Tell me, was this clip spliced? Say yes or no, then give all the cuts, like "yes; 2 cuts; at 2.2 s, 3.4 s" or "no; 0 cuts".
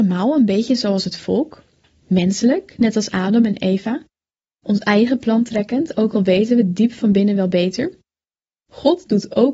no; 0 cuts